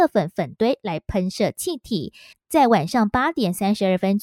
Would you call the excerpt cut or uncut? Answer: cut